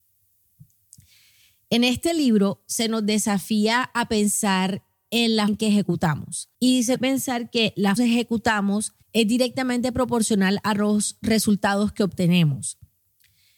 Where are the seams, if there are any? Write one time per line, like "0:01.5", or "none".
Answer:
0:05.5
0:06.5
0:07.0
0:08.0
0:09.0